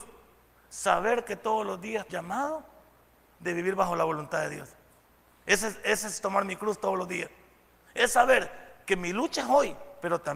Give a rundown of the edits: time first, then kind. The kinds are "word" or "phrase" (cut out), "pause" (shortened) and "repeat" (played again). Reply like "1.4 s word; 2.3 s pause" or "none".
2.1 s phrase